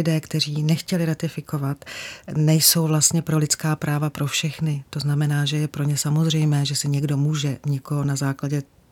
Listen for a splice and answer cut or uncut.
uncut